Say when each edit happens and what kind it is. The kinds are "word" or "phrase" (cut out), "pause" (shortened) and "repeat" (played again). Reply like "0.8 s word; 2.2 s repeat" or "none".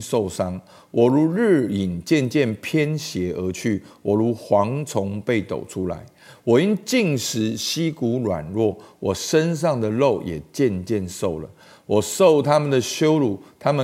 none